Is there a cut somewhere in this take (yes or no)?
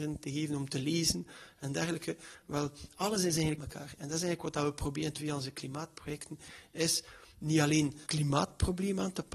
yes